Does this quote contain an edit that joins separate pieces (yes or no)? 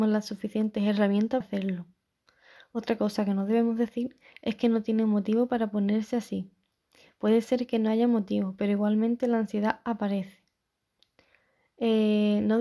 yes